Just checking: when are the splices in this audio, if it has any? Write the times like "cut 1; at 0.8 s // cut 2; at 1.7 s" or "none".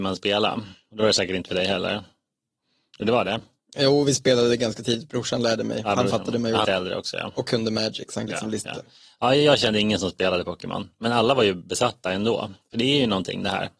cut 1; at 6.6 s // cut 2; at 8.3 s // cut 3; at 8.7 s